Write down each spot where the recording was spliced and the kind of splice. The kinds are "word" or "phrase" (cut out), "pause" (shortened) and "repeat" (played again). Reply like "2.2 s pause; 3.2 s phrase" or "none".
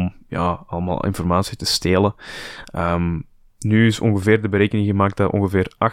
none